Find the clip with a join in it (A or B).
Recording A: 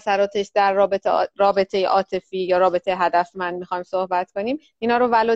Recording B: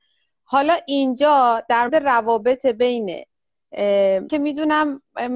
B